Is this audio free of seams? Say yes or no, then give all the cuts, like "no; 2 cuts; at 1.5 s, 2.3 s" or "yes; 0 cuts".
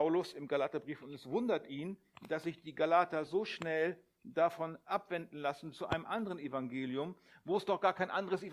yes; 0 cuts